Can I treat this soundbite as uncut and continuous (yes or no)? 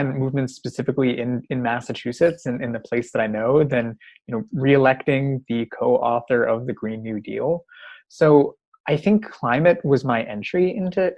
yes